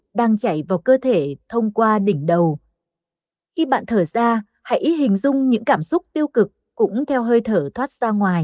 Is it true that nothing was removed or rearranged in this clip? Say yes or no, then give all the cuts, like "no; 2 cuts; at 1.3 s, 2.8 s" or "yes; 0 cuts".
yes; 0 cuts